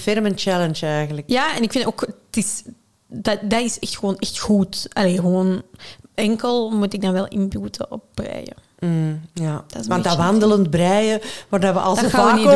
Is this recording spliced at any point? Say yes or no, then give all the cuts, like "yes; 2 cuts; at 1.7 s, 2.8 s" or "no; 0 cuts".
no; 0 cuts